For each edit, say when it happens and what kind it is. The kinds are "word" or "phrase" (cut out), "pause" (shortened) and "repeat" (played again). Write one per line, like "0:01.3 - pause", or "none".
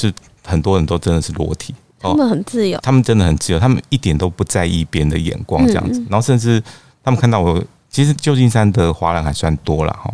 0:02.8 - word
0:07.9 - word

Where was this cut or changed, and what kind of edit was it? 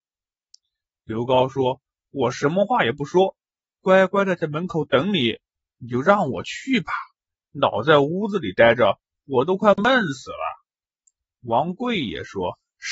none

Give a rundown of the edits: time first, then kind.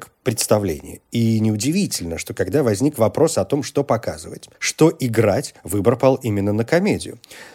0:04.5 - pause
0:05.6 - pause

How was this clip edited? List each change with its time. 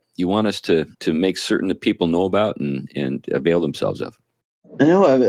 0:00.9 - pause

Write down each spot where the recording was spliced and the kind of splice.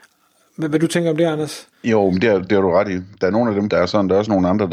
0:01.7 - pause
0:03.7 - phrase

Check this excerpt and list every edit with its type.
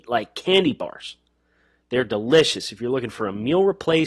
none

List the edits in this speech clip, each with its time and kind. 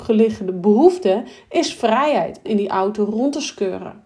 0:02.4 - word

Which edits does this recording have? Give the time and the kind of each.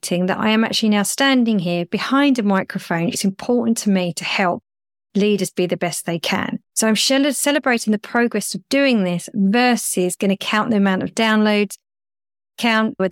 0:03.1 - phrase
0:06.7 - pause

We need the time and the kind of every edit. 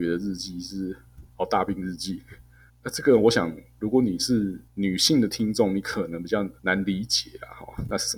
0:02.7 - pause
0:04.7 - pause
0:06.6 - pause

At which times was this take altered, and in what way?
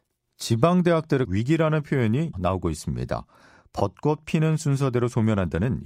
0:01.2 - word
0:02.3 - word

